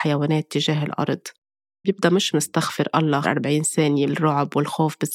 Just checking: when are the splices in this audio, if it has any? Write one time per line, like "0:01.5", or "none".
0:01.8
0:02.3
0:03.2
0:04.1